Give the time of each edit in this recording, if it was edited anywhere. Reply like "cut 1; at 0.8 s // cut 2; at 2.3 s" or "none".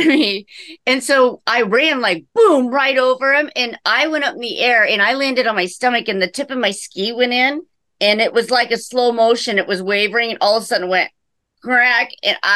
none